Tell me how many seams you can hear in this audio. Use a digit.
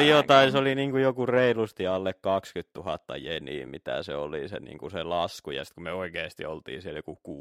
0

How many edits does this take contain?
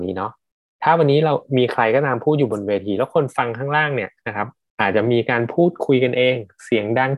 0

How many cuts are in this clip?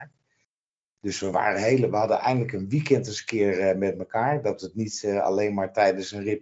0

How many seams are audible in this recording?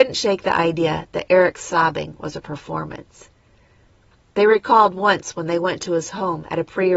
0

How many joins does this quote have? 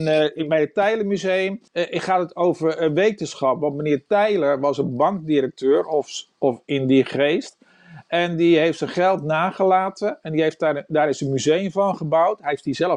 1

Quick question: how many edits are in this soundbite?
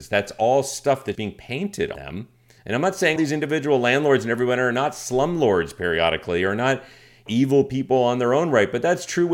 4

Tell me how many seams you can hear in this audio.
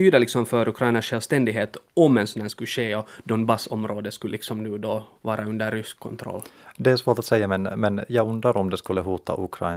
2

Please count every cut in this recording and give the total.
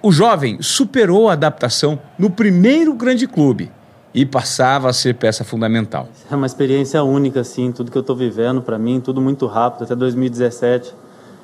0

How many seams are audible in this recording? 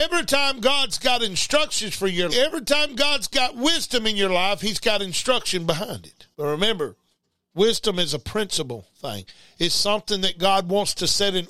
2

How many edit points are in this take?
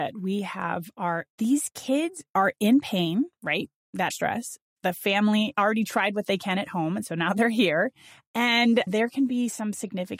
3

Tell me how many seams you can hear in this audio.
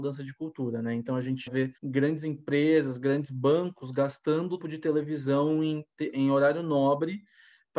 3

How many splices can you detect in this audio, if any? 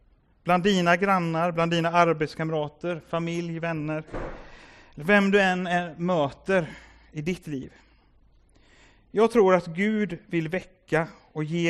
0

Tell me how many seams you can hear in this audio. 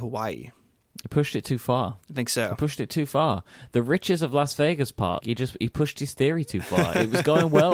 2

